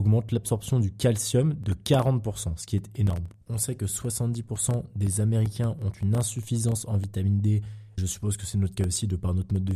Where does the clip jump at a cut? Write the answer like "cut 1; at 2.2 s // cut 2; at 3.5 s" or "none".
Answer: cut 1; at 8.0 s